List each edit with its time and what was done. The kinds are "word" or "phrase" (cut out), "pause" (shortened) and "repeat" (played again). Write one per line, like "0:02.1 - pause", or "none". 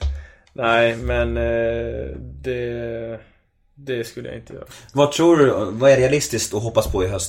none